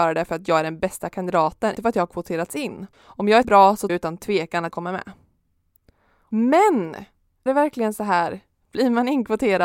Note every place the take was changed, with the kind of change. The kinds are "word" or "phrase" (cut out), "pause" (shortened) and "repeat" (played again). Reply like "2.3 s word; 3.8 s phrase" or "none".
1.8 s word; 2.9 s pause; 3.4 s word; 3.9 s word; 4.7 s word; 7.5 s word